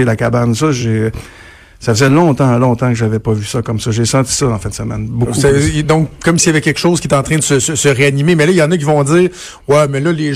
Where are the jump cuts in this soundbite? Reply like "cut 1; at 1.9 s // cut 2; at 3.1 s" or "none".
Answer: none